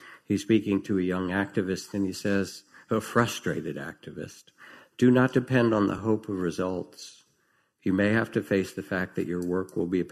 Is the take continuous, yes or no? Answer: yes